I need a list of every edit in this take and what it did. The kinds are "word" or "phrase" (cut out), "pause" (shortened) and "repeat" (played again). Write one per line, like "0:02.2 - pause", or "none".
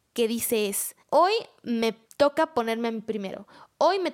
0:01.0 - pause
0:02.1 - pause